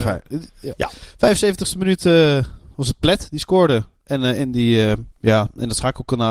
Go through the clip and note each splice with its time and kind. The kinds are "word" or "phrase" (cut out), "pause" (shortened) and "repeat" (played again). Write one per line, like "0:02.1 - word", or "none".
0:05.1 - pause